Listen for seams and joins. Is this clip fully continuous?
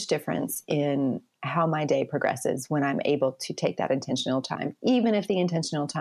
yes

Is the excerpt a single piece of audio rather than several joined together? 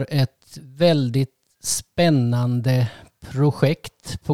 yes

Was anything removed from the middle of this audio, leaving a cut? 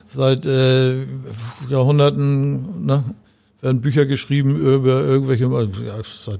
no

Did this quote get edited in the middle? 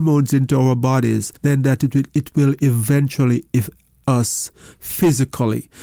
yes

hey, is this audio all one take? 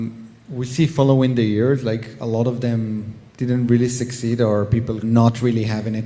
no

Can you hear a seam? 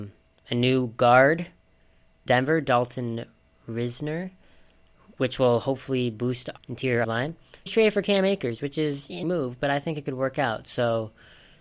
yes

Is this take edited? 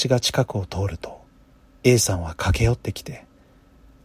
no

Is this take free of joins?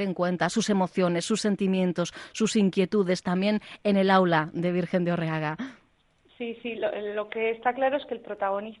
yes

